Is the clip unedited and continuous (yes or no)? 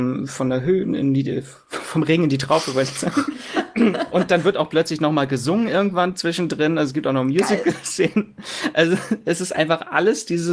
yes